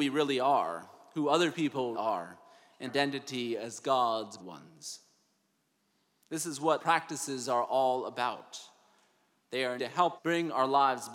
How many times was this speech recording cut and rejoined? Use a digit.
6